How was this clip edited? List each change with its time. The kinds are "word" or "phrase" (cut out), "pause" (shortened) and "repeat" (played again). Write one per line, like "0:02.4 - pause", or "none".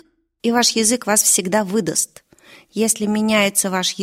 none

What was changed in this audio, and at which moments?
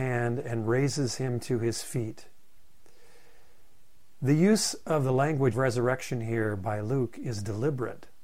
0:05.5 - word

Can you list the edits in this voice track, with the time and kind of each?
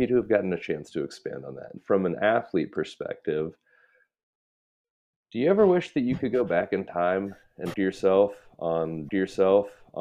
0:01.8 - word
0:07.7 - word
0:09.1 - repeat

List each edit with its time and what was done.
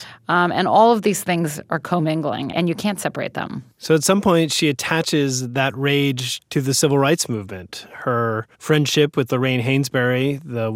0:02.5 - word
0:08.5 - pause

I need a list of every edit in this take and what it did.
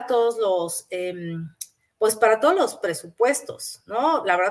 none

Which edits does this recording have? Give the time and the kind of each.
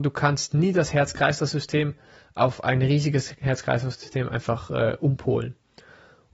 none

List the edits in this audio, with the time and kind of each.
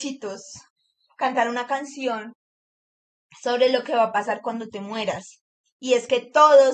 none

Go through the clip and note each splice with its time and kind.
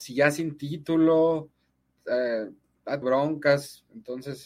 0:03.0 - word

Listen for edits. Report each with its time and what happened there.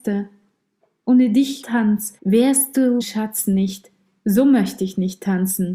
0:01.6 - phrase
0:02.2 - pause
0:03.0 - word

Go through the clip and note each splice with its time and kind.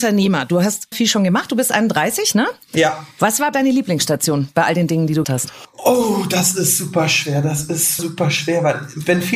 0:00.9 - word
0:03.5 - word
0:05.2 - word
0:08.0 - word

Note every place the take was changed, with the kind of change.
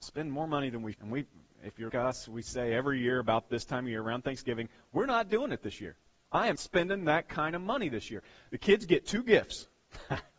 0:00.9 - word
0:01.9 - word
0:06.6 - word

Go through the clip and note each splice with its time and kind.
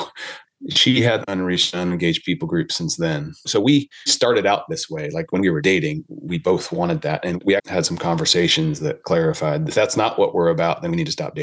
0:01.2 - phrase
0:07.6 - word
0:09.7 - phrase

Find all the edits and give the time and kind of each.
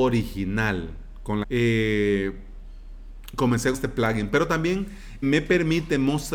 0:01.4 - phrase
0:03.7 - word
0:05.2 - word

